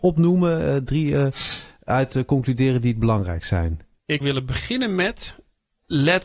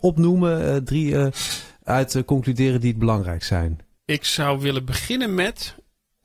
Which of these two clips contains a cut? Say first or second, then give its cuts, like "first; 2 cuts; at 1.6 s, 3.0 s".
first; 1 cut; at 4.2 s